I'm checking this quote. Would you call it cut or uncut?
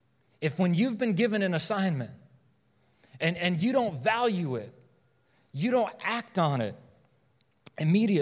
uncut